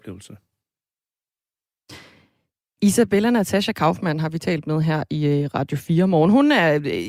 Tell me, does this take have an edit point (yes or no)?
no